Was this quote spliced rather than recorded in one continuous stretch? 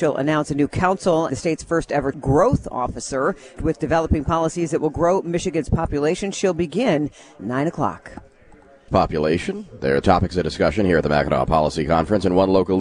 yes; 6 cuts; at 1.3 s, 2.1 s, 3.6 s, 7.4 s, 8.9 s, 10.0 s

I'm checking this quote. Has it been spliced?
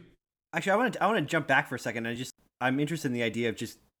no; 0 cuts

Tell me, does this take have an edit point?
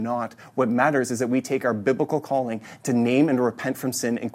no; 0 cuts

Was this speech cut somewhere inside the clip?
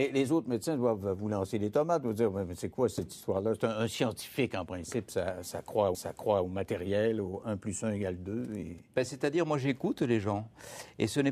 yes; 1 cut; at 5.9 s

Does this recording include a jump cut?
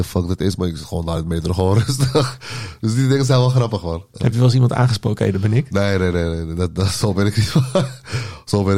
no; 0 cuts

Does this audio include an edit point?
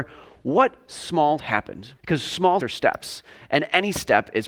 yes; 3 cuts; at 1.4 s, 2.0 s, 2.6 s

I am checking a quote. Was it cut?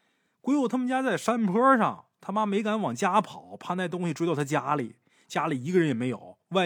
no; 0 cuts

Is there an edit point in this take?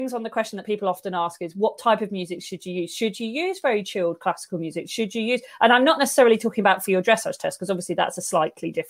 no; 0 cuts

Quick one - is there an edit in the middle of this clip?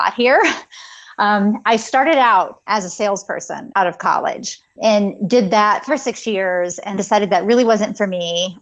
yes; 4 cuts; at 2.7 s, 3.7 s, 5.9 s, 7.0 s

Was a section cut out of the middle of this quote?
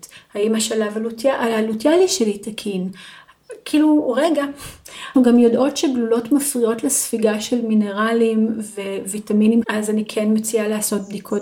yes; 2 cuts; at 5.1 s, 9.6 s

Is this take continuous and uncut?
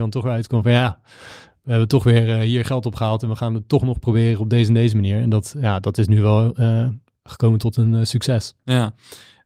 yes; 0 cuts

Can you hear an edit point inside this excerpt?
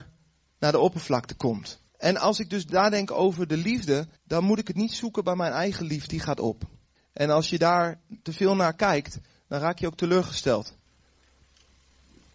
yes; 4 cuts; at 1.9 s, 4.2 s, 6.1 s, 7.0 s

